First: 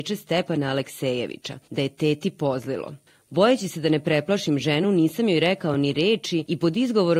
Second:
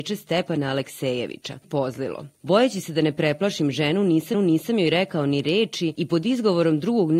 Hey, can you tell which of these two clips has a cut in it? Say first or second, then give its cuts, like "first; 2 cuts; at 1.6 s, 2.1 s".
second; 3 cuts; at 1.6 s, 2.3 s, 4.3 s